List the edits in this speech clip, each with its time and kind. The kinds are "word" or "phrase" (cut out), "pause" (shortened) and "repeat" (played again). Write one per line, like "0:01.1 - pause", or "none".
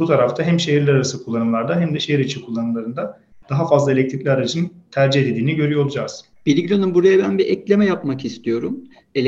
0:06.3 - pause